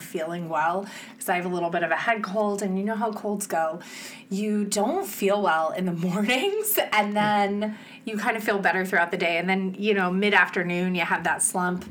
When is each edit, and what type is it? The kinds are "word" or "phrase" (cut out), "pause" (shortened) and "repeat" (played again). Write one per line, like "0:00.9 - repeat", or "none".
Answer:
none